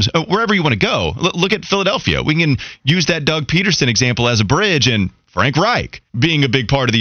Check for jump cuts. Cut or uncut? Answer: cut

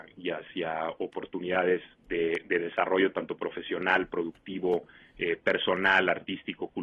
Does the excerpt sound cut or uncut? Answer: cut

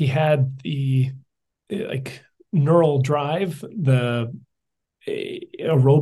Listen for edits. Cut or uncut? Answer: uncut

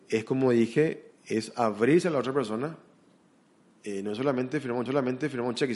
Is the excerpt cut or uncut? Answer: cut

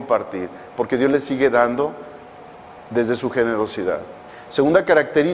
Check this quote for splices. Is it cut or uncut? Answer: uncut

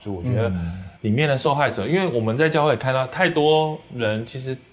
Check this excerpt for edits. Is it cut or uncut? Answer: cut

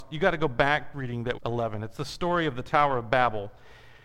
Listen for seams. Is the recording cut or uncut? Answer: cut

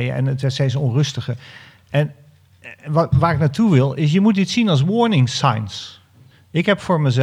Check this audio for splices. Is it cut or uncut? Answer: uncut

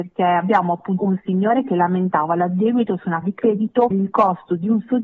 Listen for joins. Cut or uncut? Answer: cut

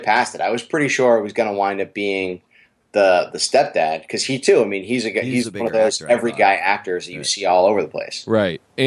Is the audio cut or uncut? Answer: uncut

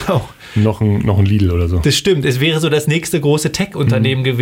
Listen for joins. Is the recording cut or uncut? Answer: uncut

